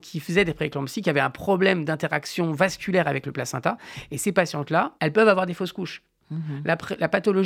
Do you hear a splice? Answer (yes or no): yes